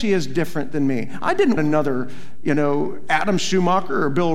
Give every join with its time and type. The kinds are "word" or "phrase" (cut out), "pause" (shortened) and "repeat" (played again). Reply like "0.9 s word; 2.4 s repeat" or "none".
1.6 s word

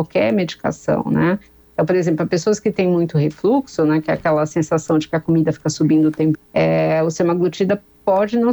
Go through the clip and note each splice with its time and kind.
6.3 s word

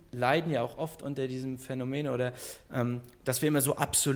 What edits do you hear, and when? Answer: none

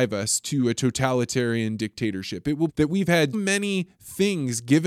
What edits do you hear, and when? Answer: 2.7 s word; 3.3 s word

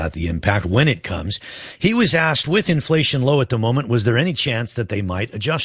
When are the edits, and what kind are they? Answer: none

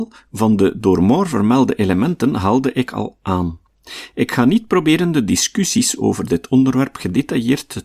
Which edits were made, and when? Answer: none

